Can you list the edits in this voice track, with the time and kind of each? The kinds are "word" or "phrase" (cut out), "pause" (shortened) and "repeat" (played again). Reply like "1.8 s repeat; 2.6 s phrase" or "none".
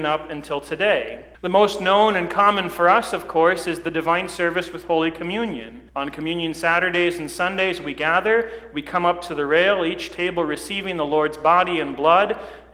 1.3 s pause; 5.9 s pause